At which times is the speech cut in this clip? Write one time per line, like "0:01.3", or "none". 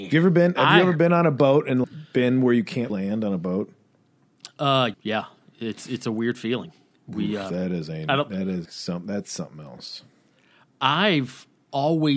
0:01.8
0:02.9
0:04.9
0:08.7